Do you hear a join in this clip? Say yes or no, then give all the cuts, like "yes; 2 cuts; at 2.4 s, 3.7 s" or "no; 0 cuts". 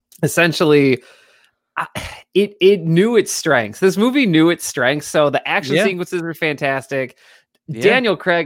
no; 0 cuts